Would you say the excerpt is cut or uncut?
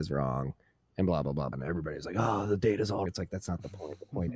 cut